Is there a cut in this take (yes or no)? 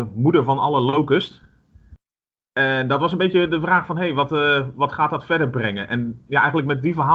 no